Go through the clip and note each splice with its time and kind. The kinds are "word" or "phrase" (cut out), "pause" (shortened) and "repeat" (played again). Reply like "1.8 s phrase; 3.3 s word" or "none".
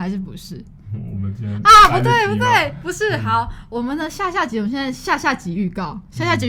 none